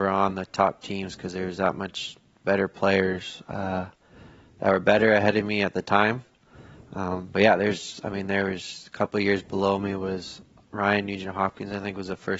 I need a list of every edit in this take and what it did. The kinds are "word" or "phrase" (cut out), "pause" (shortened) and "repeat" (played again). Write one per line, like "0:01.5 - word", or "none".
none

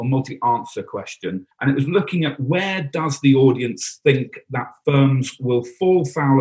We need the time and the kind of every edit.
0:01.5 - pause

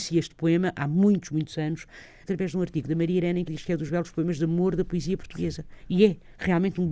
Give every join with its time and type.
0:02.2 - word
0:03.5 - word
0:03.9 - word

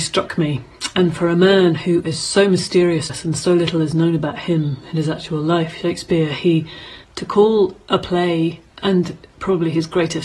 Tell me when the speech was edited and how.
0:03.1 - word
0:07.0 - pause
0:08.7 - pause

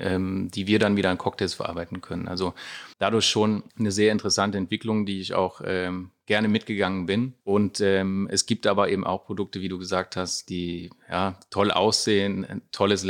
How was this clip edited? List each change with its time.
0:02.9 - pause
0:03.7 - pause
0:07.4 - pause

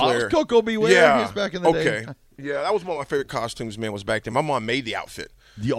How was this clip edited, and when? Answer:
none

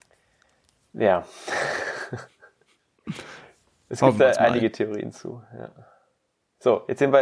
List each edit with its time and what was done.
none

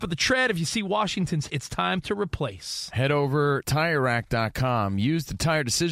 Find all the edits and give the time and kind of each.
0:01.5 - word
0:03.6 - word

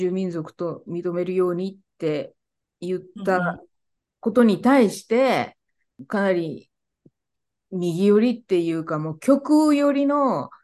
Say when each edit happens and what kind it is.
none

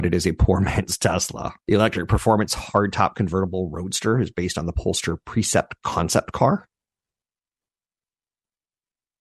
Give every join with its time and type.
0:01.6 - pause

